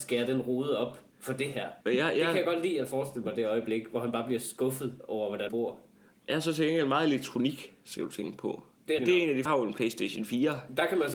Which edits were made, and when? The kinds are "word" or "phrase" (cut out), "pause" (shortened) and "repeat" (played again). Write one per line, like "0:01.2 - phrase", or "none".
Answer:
0:01.1 - pause
0:01.8 - pause
0:05.5 - word
0:09.0 - word
0:09.5 - phrase